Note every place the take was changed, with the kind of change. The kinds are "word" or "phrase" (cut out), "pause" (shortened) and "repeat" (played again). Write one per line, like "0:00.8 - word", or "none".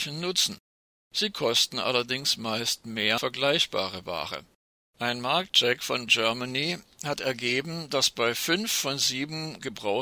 0:03.2 - word
0:04.8 - pause
0:06.1 - word